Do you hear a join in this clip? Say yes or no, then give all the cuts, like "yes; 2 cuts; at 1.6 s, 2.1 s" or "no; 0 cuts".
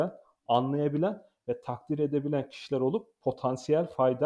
no; 0 cuts